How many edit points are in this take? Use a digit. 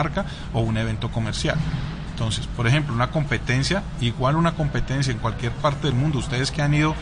0